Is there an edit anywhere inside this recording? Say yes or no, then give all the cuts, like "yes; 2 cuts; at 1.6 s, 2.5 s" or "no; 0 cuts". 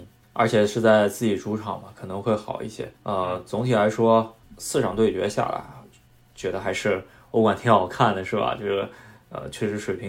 yes; 1 cut; at 3.0 s